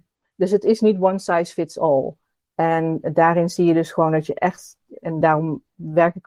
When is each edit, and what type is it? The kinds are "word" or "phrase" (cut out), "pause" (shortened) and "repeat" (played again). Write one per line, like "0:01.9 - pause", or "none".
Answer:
none

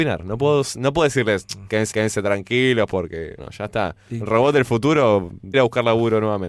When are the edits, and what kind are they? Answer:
0:01.9 - repeat
0:03.4 - word
0:05.5 - phrase

